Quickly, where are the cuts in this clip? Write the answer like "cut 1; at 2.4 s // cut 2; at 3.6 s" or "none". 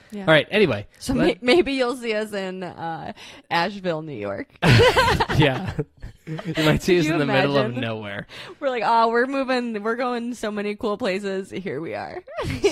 none